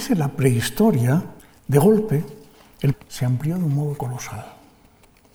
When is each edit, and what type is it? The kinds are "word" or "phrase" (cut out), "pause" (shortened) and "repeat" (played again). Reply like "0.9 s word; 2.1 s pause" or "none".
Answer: 1.4 s pause; 2.9 s word